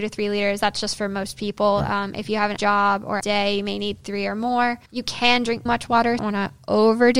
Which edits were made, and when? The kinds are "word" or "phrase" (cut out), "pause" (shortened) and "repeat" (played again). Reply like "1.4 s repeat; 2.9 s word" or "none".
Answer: 2.6 s word; 3.2 s word; 4.9 s pause; 5.7 s word; 6.2 s phrase